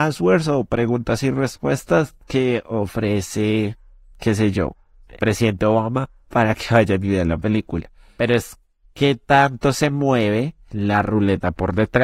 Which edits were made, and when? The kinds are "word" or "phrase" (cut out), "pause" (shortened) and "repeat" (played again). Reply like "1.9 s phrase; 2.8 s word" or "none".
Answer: 5.2 s word